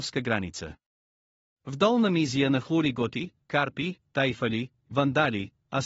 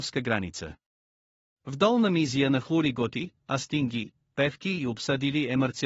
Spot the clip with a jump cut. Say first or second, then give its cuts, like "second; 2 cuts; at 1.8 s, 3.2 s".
second; 1 cut; at 3.4 s